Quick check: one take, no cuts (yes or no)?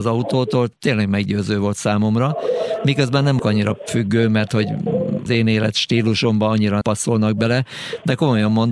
no